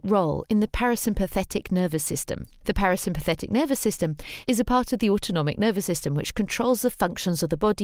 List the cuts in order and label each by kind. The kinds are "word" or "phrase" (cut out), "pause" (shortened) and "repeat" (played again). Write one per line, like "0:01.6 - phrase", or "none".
none